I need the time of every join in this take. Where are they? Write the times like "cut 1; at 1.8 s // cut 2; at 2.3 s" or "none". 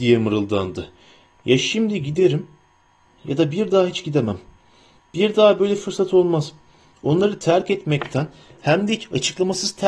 none